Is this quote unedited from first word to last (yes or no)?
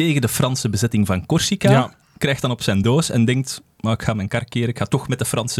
yes